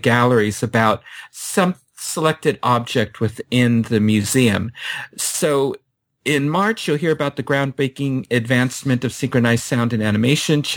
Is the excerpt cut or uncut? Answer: uncut